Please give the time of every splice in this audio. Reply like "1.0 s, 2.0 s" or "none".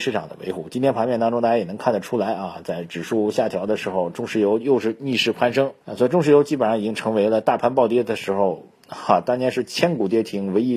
5.8 s